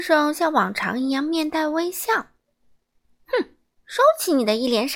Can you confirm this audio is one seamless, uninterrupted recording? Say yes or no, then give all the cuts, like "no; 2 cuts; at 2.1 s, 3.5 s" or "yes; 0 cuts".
yes; 0 cuts